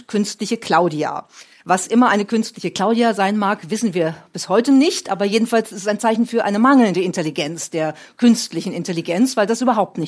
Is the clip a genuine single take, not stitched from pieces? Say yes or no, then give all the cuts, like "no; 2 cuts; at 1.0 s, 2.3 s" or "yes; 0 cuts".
yes; 0 cuts